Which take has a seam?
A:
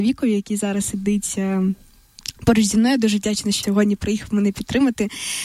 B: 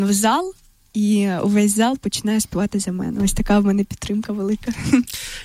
A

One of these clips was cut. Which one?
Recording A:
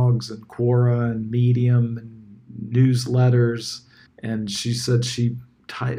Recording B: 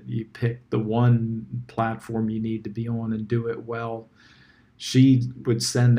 A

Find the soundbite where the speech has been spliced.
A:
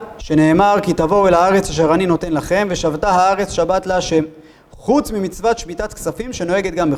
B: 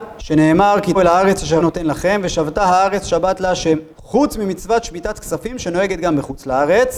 B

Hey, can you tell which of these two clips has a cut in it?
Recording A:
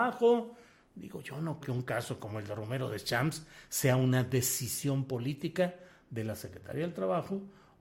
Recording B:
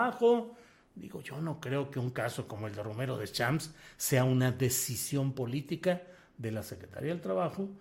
A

